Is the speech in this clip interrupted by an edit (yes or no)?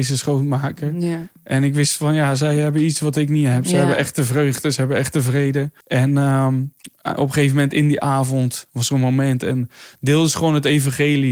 yes